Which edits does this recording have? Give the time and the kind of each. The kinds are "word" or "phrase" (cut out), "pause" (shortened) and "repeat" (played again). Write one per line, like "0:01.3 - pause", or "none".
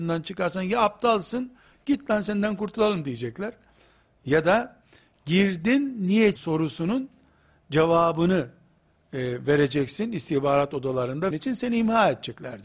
0:06.4 - word
0:11.3 - word